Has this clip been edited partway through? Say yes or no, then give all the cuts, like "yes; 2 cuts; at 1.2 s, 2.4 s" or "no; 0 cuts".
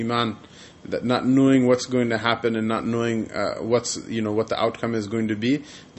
no; 0 cuts